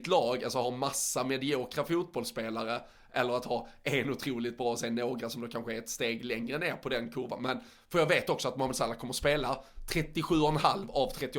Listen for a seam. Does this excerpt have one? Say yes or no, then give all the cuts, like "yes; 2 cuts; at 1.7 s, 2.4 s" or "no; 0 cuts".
no; 0 cuts